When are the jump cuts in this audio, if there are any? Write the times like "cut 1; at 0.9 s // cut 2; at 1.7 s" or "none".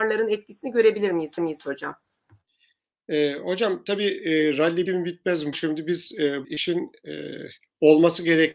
cut 1; at 1.4 s // cut 2; at 4.9 s // cut 3; at 5.5 s // cut 4; at 6.4 s